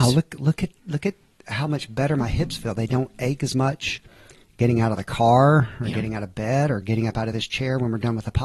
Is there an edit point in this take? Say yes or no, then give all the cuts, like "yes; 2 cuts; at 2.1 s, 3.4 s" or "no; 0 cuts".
no; 0 cuts